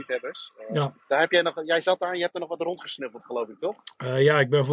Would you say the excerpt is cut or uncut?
uncut